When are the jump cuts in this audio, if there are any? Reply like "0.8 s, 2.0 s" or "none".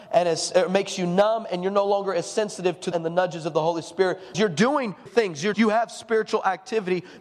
2.9 s, 4.3 s, 5.1 s, 5.5 s